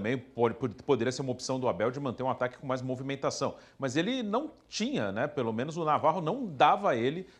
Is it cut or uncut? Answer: uncut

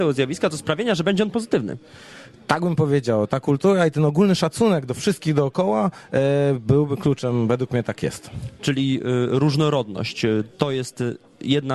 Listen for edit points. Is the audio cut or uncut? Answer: uncut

